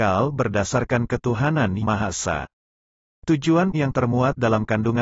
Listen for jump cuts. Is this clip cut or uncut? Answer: cut